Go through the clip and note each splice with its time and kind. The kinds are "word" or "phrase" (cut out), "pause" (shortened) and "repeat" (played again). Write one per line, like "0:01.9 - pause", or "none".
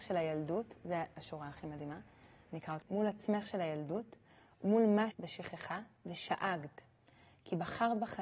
0:02.8 - word
0:05.1 - word